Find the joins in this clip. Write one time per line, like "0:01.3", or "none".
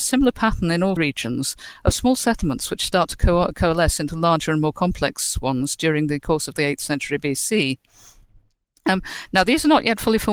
0:01.0